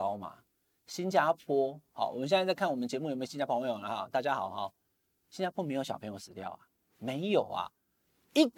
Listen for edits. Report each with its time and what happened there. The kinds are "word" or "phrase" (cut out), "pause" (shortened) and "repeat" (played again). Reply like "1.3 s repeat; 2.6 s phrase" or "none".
none